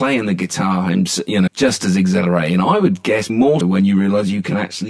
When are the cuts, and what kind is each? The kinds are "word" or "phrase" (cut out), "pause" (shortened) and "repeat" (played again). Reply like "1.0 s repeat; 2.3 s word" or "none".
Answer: 1.5 s phrase; 3.3 s word; 3.6 s word